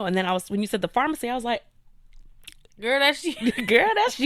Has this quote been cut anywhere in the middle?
no; 0 cuts

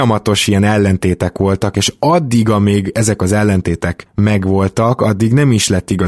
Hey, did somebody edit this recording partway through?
no; 0 cuts

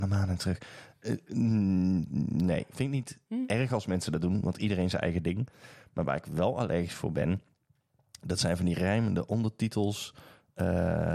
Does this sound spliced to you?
no; 0 cuts

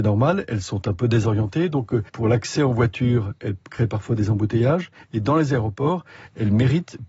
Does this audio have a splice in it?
yes; 1 cut; at 2.1 s

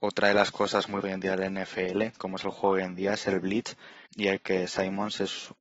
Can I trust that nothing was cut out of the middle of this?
no; 4 cuts; at 1.0 s, 2.2 s, 4.1 s, 4.4 s

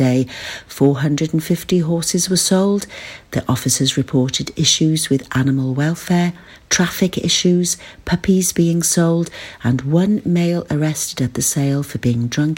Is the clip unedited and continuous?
yes; 0 cuts

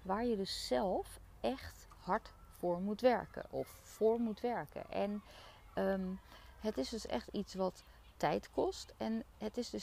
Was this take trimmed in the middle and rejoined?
no; 0 cuts

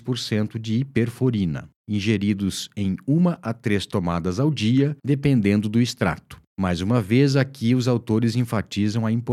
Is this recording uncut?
no; 3 cuts; at 1.8 s, 5.0 s, 6.5 s

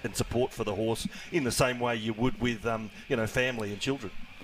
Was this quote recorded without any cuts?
yes; 0 cuts

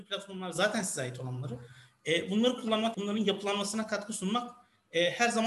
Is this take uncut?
no; 1 cut; at 2.9 s

